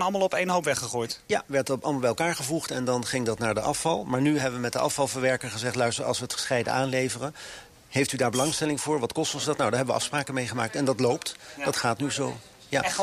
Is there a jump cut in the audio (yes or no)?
no